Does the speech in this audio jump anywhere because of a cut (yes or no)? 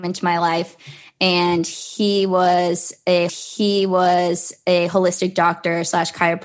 yes